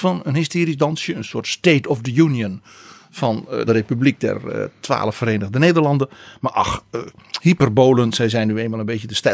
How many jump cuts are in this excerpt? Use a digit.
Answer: 1